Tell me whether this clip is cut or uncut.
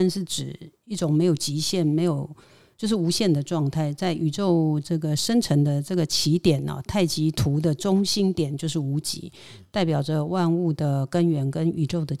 uncut